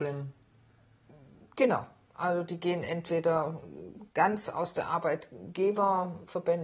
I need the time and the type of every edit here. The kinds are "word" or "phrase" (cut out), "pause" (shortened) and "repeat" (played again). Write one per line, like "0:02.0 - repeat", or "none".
none